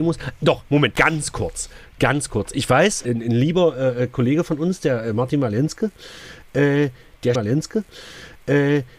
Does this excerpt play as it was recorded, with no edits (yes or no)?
no